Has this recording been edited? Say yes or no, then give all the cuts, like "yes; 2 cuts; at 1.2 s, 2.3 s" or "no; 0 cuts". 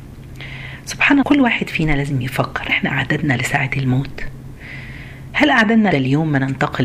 yes; 4 cuts; at 1.2 s, 2.7 s, 3.4 s, 5.9 s